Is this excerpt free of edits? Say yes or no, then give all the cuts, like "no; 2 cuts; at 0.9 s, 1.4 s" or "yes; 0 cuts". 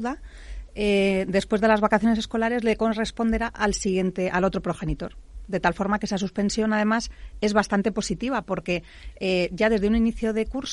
yes; 0 cuts